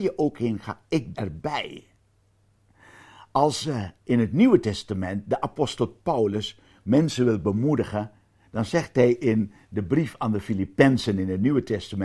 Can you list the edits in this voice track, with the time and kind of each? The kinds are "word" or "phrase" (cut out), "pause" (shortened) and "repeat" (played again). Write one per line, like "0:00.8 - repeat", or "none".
0:01.1 - word
0:04.0 - pause